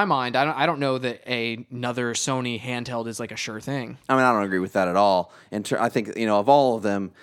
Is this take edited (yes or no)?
no